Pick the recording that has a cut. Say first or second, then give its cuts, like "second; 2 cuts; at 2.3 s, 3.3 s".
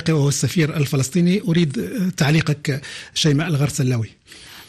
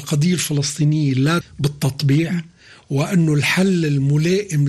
second; 1 cut; at 1.4 s